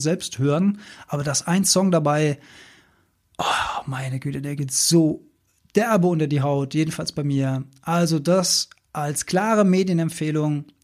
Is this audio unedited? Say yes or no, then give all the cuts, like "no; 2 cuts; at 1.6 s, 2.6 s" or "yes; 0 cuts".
yes; 0 cuts